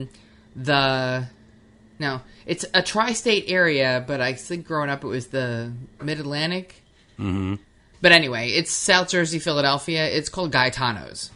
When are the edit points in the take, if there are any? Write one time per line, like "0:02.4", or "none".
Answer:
none